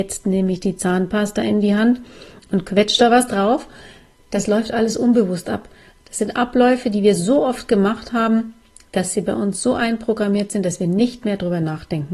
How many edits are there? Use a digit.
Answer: 0